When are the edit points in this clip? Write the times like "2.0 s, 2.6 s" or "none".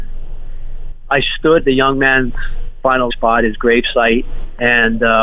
1.6 s, 3.1 s